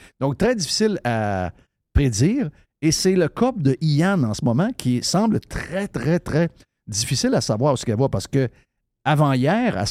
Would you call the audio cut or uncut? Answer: uncut